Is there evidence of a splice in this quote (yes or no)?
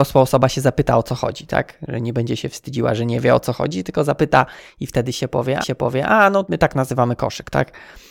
yes